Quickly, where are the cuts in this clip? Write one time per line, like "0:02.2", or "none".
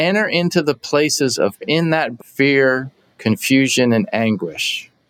0:01.6
0:02.2